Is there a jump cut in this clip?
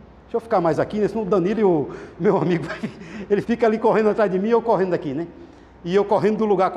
yes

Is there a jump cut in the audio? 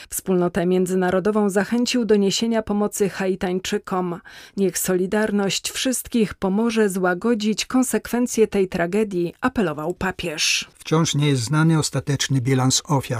no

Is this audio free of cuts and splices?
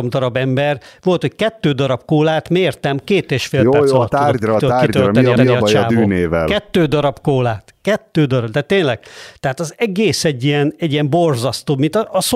no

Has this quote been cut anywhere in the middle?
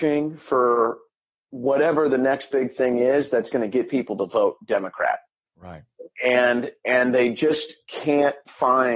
no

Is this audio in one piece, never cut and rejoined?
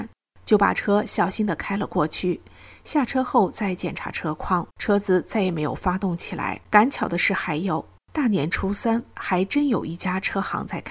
no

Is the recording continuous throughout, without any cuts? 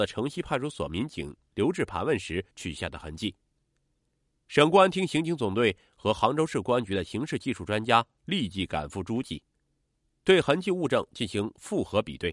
no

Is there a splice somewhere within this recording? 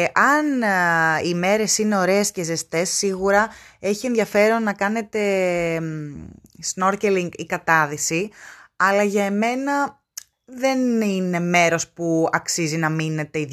no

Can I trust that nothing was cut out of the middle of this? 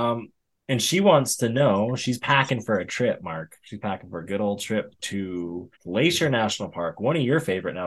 no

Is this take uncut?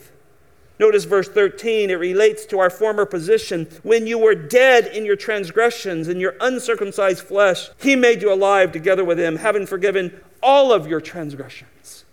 no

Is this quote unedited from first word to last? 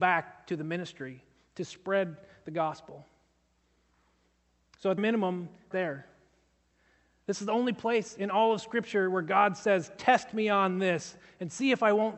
no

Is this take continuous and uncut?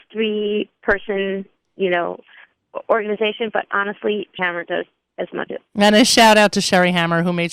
no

